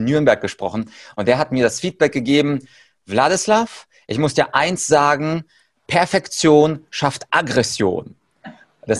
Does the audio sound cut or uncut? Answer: uncut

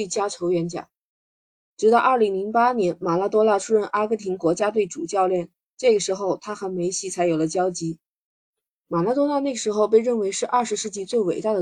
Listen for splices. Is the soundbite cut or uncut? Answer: uncut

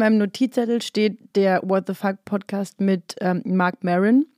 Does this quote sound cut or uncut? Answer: uncut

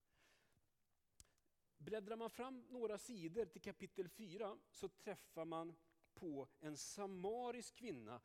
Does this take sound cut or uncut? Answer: uncut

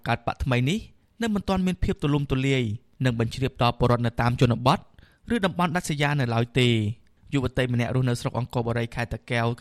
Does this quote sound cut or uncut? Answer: uncut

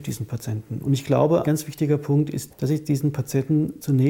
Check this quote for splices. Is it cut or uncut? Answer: cut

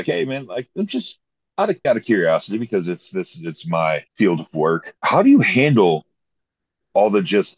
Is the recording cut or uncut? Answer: cut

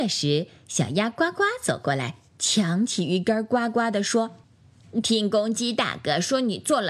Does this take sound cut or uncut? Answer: cut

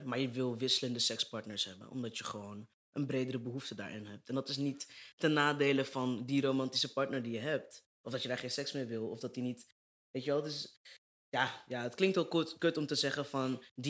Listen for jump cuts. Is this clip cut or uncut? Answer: uncut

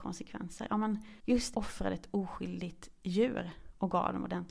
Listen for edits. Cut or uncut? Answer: cut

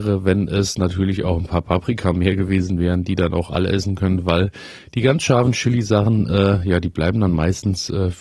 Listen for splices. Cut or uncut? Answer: uncut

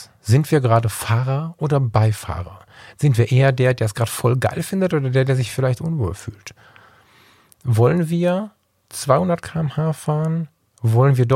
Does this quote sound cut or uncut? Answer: uncut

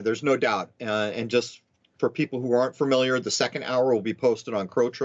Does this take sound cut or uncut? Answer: uncut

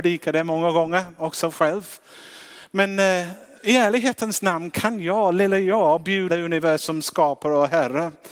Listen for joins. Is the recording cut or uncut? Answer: cut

